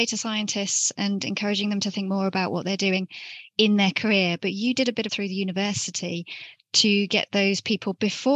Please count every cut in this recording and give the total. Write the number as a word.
one